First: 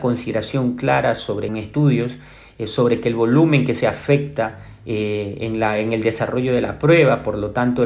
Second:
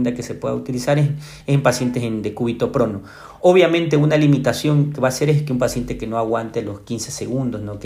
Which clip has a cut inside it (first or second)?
first